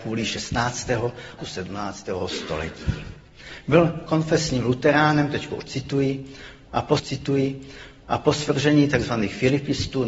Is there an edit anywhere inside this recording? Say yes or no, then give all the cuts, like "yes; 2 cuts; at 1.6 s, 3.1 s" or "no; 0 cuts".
yes; 2 cuts; at 1.4 s, 7.0 s